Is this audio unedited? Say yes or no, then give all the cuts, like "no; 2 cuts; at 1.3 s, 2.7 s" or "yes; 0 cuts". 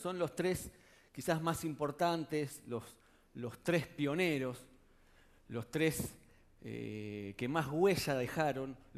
yes; 0 cuts